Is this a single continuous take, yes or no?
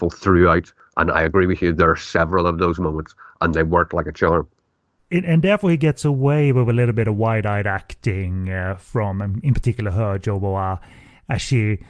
yes